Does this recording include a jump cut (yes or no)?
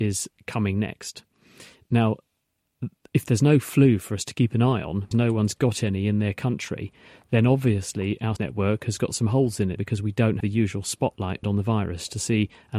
yes